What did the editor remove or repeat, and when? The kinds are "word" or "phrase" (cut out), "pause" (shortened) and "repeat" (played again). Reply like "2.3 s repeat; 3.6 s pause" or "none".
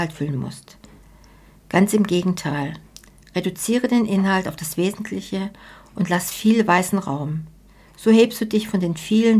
none

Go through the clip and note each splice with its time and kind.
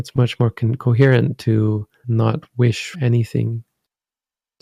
2.0 s word; 2.9 s word

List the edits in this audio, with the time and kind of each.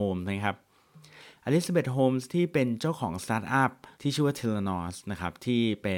3.9 s pause

